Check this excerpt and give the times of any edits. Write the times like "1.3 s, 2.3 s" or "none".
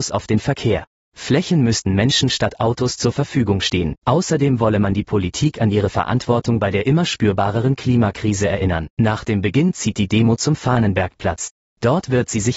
4.0 s, 8.9 s